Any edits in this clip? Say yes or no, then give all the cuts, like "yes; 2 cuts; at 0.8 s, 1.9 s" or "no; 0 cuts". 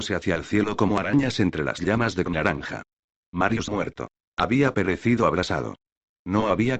yes; 2 cuts; at 2.3 s, 3.7 s